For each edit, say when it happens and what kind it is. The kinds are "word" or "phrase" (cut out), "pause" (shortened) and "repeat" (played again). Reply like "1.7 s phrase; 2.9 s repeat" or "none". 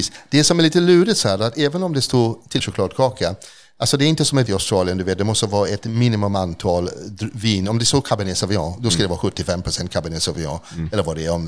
2.6 s phrase; 4.5 s phrase